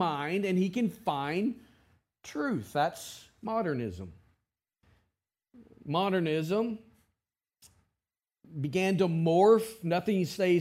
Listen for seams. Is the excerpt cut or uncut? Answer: uncut